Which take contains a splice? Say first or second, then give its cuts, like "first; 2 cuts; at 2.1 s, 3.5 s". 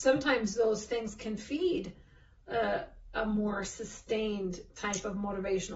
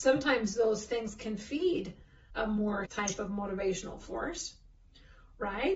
second; 2 cuts; at 2.3 s, 2.9 s